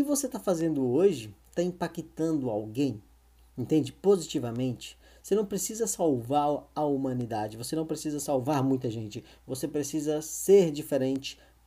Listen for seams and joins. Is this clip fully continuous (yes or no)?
yes